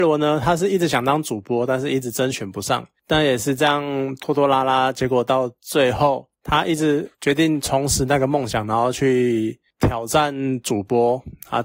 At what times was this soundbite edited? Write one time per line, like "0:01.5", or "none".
0:07.1